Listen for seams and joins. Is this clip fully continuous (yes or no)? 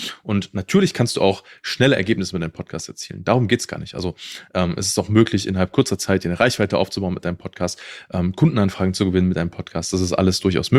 yes